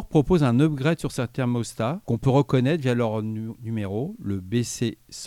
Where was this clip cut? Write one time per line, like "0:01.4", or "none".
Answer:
none